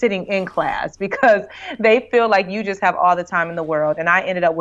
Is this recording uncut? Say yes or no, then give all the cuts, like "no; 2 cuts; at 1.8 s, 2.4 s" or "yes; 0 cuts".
yes; 0 cuts